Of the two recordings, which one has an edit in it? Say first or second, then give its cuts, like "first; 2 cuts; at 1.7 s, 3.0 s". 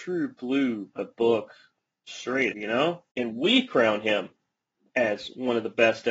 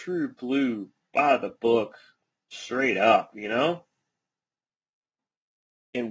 first; 3 cuts; at 1.0 s, 2.5 s, 3.1 s